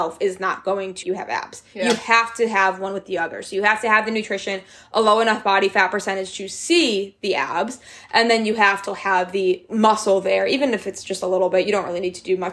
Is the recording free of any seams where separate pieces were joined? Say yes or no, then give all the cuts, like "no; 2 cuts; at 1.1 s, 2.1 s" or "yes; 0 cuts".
no; 2 cuts; at 1.0 s, 8.9 s